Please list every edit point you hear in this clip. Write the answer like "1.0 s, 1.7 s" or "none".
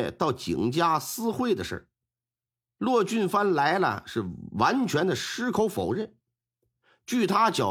none